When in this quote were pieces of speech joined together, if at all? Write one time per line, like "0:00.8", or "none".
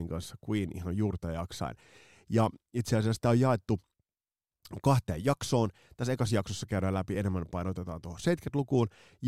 none